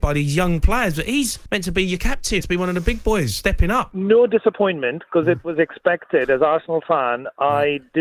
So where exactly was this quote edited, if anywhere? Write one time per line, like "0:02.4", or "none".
0:02.4